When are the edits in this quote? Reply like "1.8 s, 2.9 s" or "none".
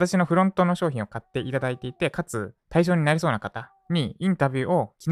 2.6 s